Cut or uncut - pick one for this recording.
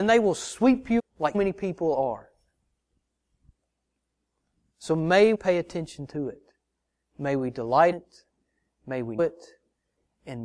cut